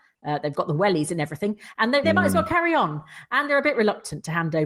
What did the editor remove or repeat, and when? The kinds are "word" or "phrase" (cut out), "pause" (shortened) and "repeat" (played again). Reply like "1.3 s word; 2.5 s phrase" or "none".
2.0 s word